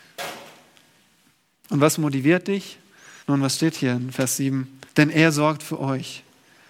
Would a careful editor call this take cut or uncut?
cut